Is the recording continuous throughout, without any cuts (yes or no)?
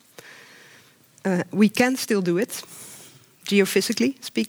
yes